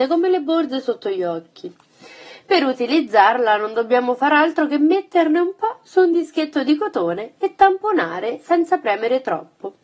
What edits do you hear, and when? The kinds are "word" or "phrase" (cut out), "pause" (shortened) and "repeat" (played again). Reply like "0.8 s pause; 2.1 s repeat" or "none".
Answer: none